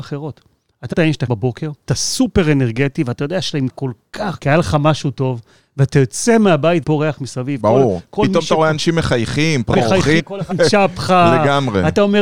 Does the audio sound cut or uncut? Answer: cut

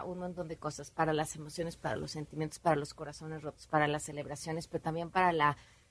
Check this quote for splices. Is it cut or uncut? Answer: uncut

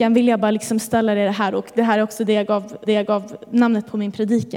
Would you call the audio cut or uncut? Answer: cut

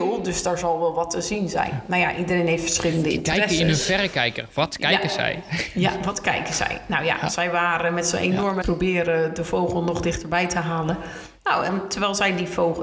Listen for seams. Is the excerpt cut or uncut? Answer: cut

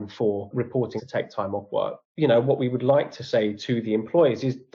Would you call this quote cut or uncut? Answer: cut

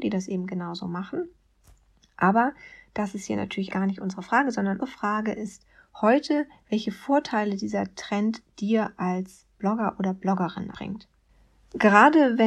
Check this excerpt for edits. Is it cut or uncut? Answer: cut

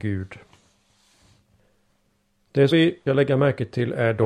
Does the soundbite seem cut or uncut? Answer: cut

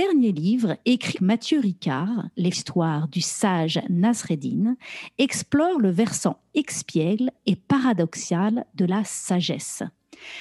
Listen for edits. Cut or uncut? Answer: cut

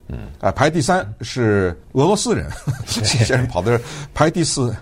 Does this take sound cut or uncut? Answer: cut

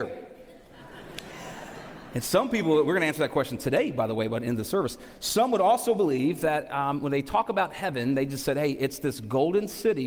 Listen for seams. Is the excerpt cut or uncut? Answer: uncut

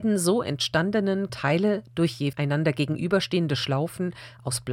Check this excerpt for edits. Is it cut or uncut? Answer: cut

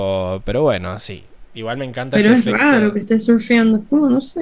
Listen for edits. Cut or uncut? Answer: uncut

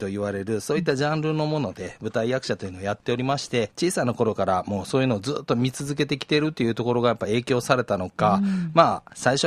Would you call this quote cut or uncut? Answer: cut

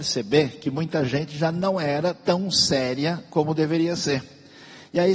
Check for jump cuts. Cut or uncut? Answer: uncut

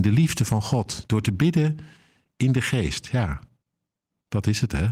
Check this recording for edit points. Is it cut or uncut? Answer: uncut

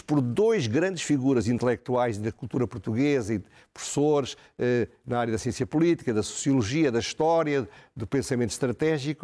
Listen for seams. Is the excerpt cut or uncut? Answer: uncut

